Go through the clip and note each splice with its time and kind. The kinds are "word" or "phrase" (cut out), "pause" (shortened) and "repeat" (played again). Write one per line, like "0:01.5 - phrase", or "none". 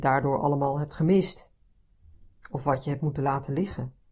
none